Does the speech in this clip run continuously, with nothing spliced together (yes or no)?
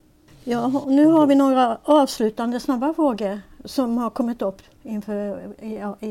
yes